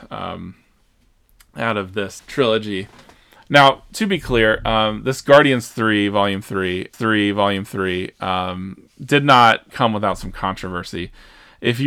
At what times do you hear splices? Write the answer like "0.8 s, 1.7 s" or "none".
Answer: 2.2 s, 6.9 s, 9.7 s